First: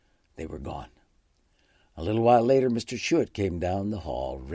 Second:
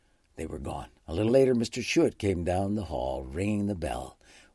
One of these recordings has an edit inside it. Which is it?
second; 2 cuts; at 1.0 s, 1.3 s

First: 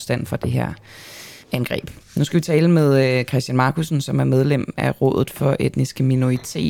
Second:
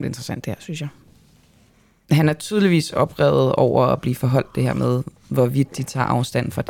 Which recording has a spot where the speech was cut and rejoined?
first; 1 cut; at 1.4 s

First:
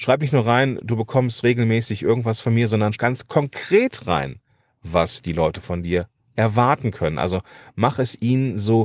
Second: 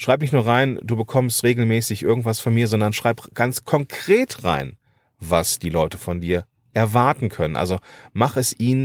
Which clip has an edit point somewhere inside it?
first; 1 cut; at 2.9 s

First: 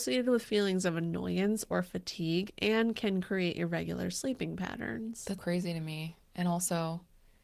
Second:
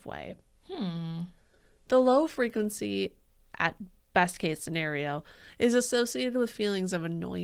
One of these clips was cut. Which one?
first; 1 cut; at 5.4 s

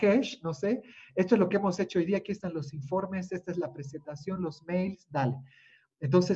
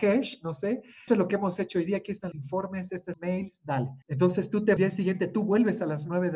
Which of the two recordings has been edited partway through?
second; 5 cuts; at 1.1 s, 2.3 s, 3.1 s, 4.0 s, 4.8 s

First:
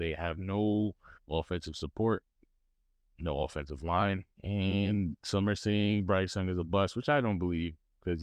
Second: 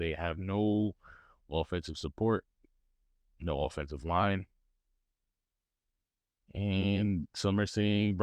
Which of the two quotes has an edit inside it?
first; 2 cuts; at 1.2 s, 4.3 s

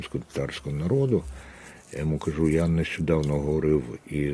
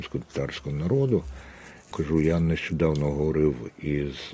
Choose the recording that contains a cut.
second; 1 cut; at 1.9 s

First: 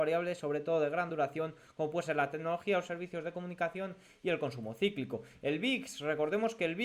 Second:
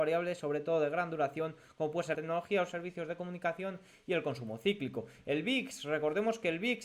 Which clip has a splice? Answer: second; 1 cut; at 2.1 s

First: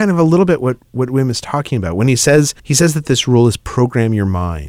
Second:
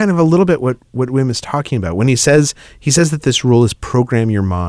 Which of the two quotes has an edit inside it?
first; 1 cut; at 2.6 s

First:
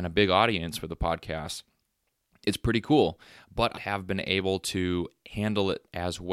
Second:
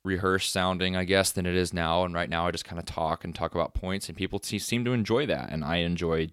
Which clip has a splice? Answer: first; 1 cut; at 3.8 s

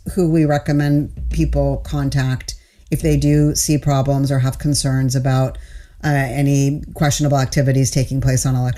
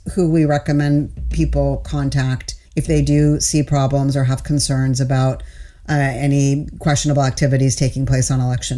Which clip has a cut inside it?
second; 1 cut; at 2.7 s

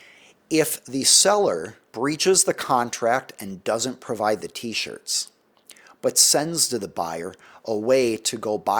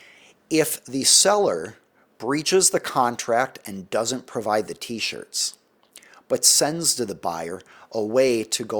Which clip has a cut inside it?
first; 1 cut; at 1.9 s

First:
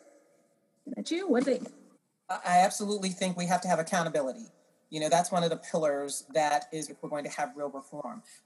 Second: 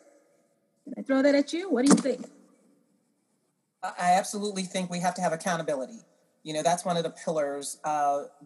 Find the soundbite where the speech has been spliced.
first; 5 cuts; at 1.0 s, 1.4 s, 1.9 s, 6.3 s, 6.9 s

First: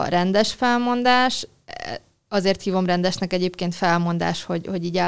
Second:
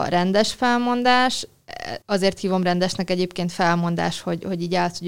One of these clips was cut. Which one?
second; 1 cut; at 2.0 s

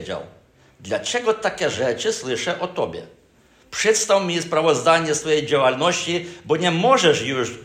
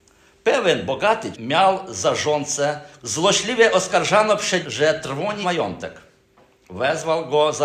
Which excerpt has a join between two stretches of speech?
second; 4 cuts; at 1.3 s, 3.0 s, 4.6 s, 5.4 s

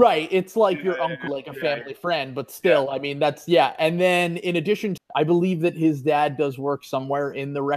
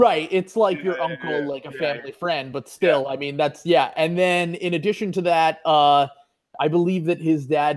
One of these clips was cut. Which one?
first; 2 cuts; at 1.3 s, 5.0 s

